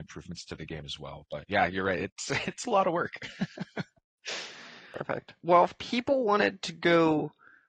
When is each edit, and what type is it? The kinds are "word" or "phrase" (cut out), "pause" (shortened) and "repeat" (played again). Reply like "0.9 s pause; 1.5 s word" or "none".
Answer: none